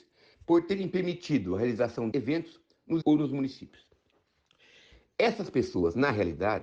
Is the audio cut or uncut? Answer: cut